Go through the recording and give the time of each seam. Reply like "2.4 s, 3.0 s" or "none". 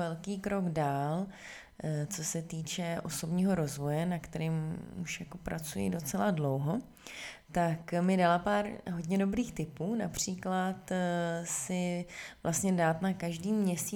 none